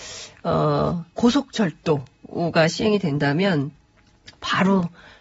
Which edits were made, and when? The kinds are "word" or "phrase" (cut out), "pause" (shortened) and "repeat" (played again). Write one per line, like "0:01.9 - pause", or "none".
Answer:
0:01.1 - pause